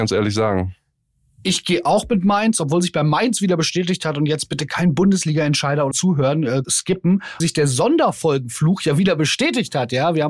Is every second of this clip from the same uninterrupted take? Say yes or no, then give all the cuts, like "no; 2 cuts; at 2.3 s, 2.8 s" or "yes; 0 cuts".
no; 3 cuts; at 5.9 s, 6.6 s, 7.4 s